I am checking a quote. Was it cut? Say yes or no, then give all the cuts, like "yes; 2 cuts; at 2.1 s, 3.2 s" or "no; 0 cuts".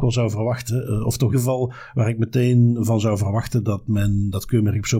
yes; 1 cut; at 1.3 s